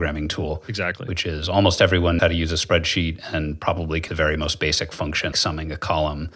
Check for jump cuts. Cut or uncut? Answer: cut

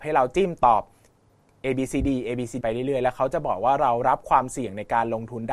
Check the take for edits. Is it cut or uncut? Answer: cut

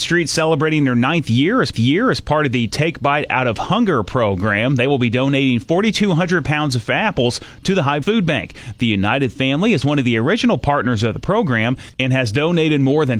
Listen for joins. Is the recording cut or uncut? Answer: cut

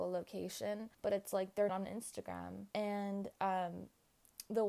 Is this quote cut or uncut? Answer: cut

